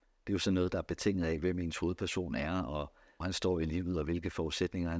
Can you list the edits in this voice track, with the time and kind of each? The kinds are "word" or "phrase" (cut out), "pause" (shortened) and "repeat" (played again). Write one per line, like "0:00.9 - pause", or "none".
0:03.2 - word